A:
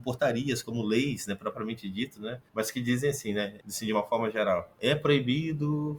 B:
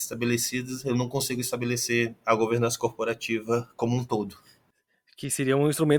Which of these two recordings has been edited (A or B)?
A